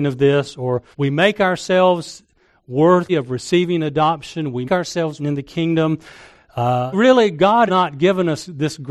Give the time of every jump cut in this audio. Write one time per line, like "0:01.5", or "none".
0:00.9
0:03.1
0:04.6
0:05.2
0:06.9
0:07.7